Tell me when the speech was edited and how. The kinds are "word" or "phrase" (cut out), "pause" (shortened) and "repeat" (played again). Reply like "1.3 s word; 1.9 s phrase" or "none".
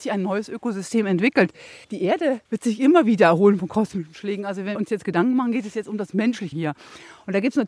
1.8 s pause; 2.4 s pause; 4.7 s word; 6.5 s word